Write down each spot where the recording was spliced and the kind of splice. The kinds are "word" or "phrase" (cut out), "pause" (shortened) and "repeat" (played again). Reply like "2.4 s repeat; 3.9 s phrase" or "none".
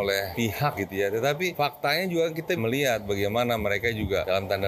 2.6 s word

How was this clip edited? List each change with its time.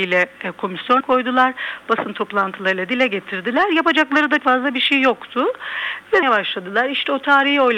1.0 s word; 4.4 s word; 6.2 s word

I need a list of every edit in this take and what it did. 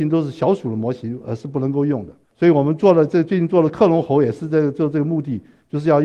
2.2 s pause

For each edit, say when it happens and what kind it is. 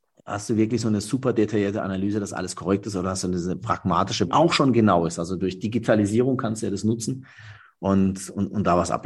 4.3 s phrase

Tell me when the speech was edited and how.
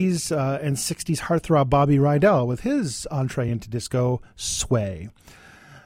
none

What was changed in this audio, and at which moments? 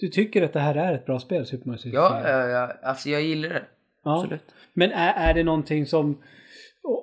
none

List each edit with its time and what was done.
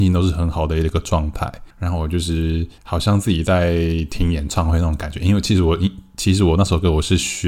1.7 s pause; 2.8 s pause

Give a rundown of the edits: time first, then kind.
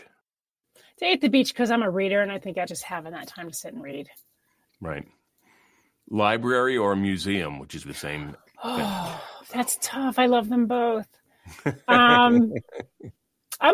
2.7 s word; 7.8 s word

